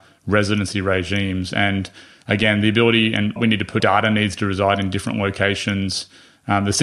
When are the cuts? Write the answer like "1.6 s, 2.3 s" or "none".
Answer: 3.4 s, 3.8 s